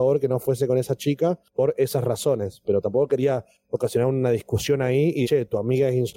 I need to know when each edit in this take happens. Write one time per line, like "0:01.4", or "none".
0:05.2